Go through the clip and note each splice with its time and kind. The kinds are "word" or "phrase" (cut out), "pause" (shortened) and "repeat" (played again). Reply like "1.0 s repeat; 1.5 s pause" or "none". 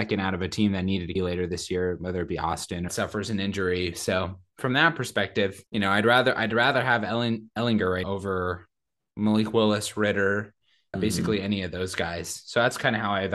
1.2 s word; 2.9 s phrase; 5.7 s pause; 8.0 s word; 10.9 s word